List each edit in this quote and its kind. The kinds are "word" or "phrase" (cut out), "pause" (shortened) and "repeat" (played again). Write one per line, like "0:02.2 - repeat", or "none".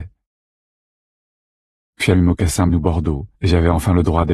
0:02.1 - word
0:02.7 - phrase
0:03.4 - pause

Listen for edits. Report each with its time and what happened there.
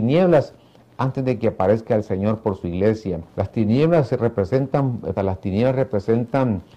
0:03.3 - pause
0:05.2 - word

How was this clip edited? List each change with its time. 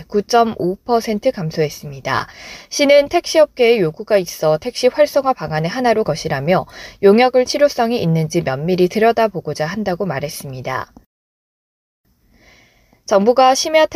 0:06.1 - word
0:07.5 - word

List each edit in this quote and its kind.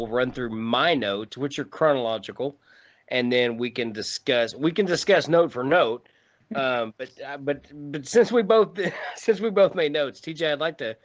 none

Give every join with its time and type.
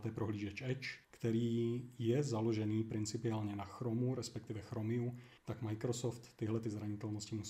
0:01.0 - pause
0:05.4 - pause

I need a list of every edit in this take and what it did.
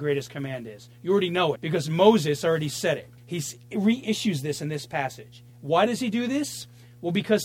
0:01.6 - word
0:03.2 - pause
0:05.5 - pause

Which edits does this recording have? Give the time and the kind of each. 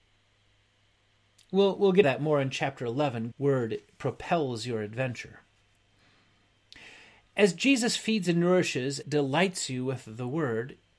0:02.0 - word
0:03.3 - word
0:09.0 - word

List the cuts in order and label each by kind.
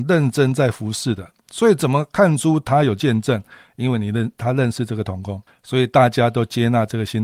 0:05.5 - pause

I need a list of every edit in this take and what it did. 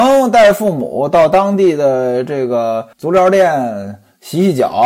0:02.9 - pause

